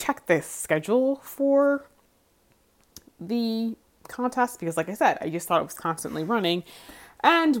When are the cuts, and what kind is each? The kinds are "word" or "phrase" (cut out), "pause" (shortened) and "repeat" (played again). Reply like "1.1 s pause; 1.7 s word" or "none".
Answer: none